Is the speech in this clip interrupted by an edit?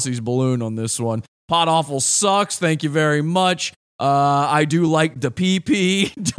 no; 0 cuts

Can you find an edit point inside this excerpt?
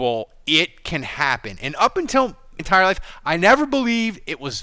yes; 1 cut; at 2.6 s

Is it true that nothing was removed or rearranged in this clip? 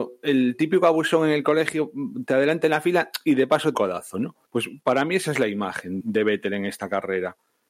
no; 3 cuts; at 3.7 s, 4.4 s, 6.0 s

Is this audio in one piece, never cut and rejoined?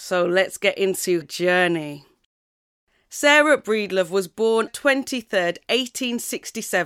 no; 2 cuts; at 1.2 s, 4.7 s

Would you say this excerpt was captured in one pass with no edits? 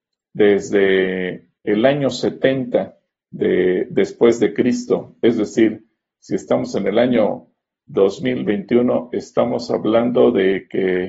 no; 2 cuts; at 1.6 s, 3.1 s

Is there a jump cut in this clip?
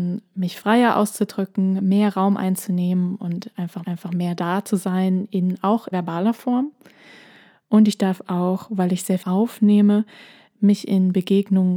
yes; 3 cuts; at 3.8 s, 5.9 s, 9.2 s

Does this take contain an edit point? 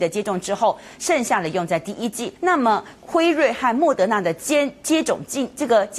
yes; 1 cut; at 2.4 s

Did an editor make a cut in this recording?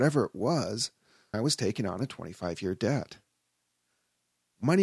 yes; 1 cut; at 1.3 s

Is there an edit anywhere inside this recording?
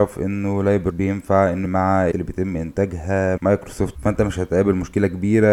yes; 5 cuts; at 0.9 s, 1.7 s, 2.1 s, 3.4 s, 4.0 s

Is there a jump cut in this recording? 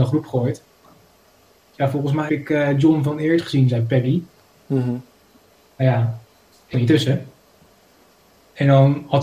yes; 3 cuts; at 1.8 s, 2.3 s, 6.7 s

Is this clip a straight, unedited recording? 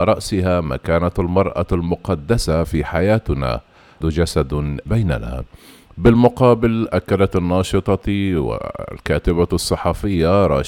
no; 2 cuts; at 4.0 s, 4.9 s

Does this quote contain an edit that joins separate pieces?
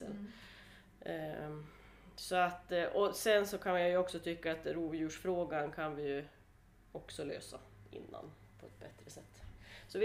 no; 0 cuts

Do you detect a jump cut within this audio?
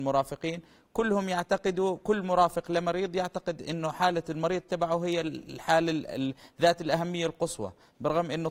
no; 0 cuts

